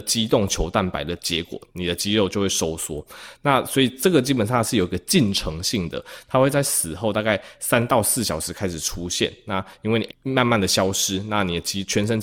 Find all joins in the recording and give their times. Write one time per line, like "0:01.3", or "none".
0:01.7
0:10.1